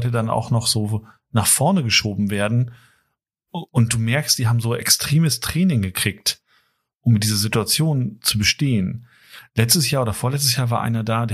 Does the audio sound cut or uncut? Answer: uncut